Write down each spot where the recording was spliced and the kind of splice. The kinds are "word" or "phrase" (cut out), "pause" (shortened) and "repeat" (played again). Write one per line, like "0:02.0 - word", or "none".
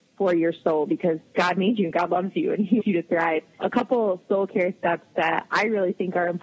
0:02.8 - word
0:03.6 - word